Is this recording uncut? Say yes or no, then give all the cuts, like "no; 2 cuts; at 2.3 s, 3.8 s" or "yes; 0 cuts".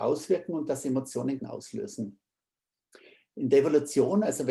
no; 1 cut; at 1.4 s